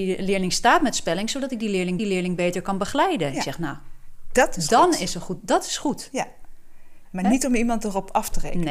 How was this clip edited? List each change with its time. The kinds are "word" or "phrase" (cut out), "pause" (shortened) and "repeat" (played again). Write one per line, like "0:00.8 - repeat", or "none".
0:02.0 - repeat
0:07.1 - word